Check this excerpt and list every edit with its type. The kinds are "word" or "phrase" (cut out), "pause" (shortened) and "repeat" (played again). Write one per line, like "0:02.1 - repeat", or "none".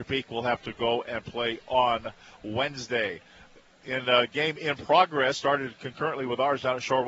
none